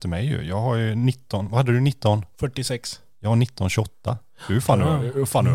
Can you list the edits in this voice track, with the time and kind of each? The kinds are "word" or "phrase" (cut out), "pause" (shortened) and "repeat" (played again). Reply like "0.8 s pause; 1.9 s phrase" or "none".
none